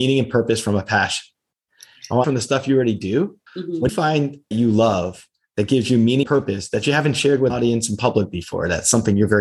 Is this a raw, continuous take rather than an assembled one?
no; 6 cuts; at 2.2 s, 3.5 s, 3.9 s, 4.5 s, 6.2 s, 7.5 s

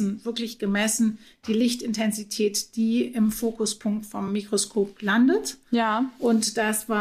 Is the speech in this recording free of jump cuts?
yes; 0 cuts

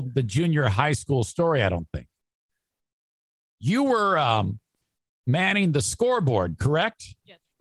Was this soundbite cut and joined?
no; 0 cuts

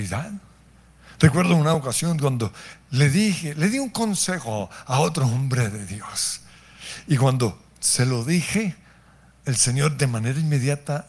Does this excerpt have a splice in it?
no; 0 cuts

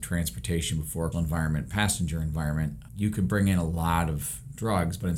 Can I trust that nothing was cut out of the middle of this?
no; 2 cuts; at 1.1 s, 2.9 s

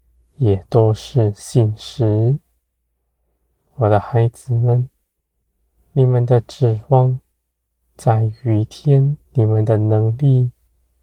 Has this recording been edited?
yes; 1 cut; at 9.2 s

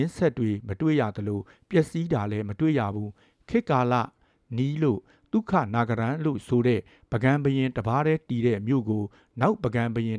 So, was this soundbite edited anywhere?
no; 0 cuts

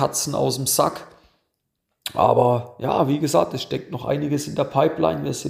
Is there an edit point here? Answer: no; 0 cuts

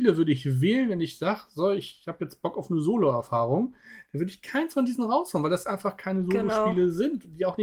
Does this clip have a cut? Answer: no; 0 cuts

